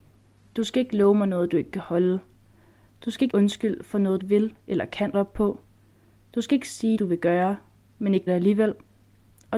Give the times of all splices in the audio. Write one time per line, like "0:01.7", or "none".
0:03.3
0:04.2
0:05.1
0:07.0
0:08.3

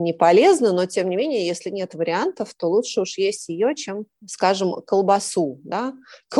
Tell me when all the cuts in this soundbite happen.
0:04.1

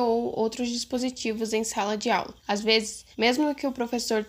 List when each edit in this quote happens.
0:02.4
0:03.1

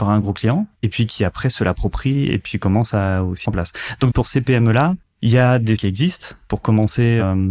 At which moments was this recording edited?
0:03.4
0:04.1
0:05.8

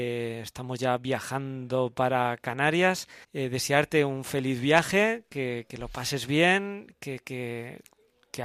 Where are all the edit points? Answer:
0:03.2

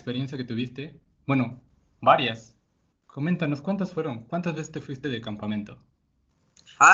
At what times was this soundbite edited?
none

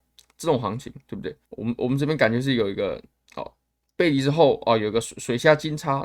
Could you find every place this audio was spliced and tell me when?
0:01.5

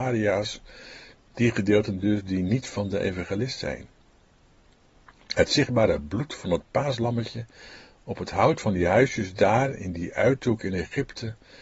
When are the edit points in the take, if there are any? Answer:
none

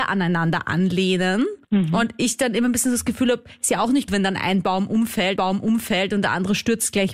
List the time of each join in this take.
0:01.6
0:04.1
0:05.4

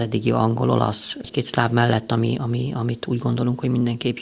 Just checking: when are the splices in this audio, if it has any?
0:01.7
0:02.4

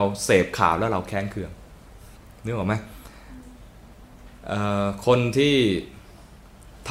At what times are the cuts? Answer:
0:02.2

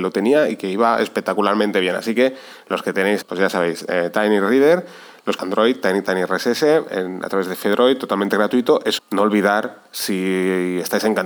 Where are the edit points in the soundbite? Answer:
0:03.2
0:05.4
0:09.0

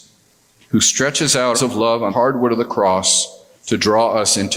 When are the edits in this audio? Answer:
0:01.5
0:02.1
0:03.5

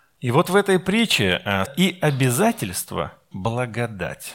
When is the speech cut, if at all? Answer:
0:01.6
0:03.3

